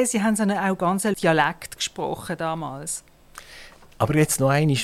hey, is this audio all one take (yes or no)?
no